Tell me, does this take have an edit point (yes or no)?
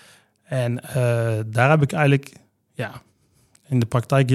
no